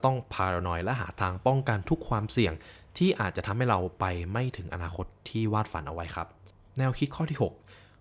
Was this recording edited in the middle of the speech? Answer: yes; 1 cut; at 6.5 s

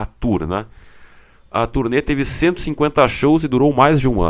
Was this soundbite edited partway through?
no; 0 cuts

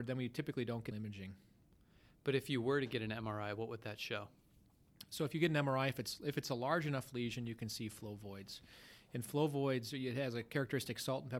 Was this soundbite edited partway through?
yes; 1 cut; at 0.9 s

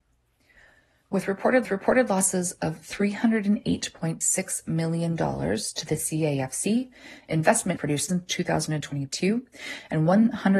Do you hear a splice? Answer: yes; 3 cuts; at 1.6 s, 7.8 s, 8.1 s

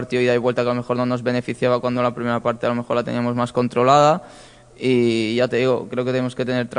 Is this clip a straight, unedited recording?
yes; 0 cuts

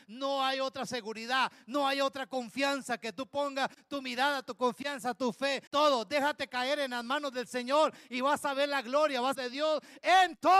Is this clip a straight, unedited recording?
no; 2 cuts; at 5.7 s, 9.3 s

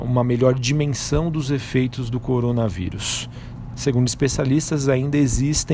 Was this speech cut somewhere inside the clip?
no; 0 cuts

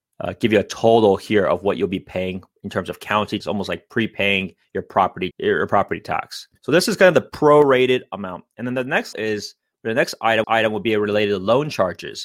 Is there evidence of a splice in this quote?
yes; 5 cuts; at 3.4 s, 5.3 s, 6.6 s, 9.1 s, 10.4 s

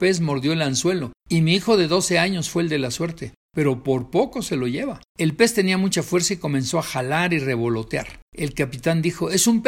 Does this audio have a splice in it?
yes; 1 cut; at 8.3 s

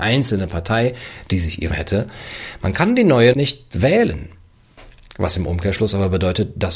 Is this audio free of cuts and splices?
no; 2 cuts; at 1.7 s, 3.3 s

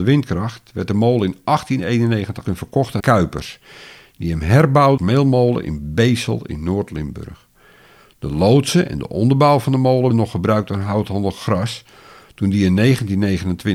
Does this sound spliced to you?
yes; 4 cuts; at 2.5 s, 3.0 s, 5.0 s, 10.1 s

